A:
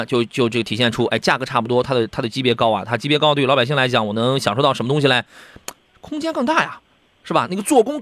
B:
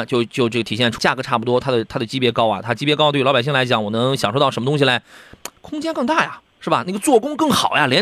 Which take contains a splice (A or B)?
B